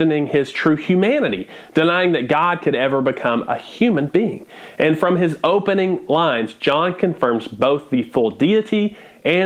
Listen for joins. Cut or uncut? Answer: uncut